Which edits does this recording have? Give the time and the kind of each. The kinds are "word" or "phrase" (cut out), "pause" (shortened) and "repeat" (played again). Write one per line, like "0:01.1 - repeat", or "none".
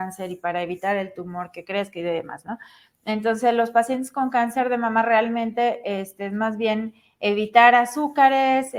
none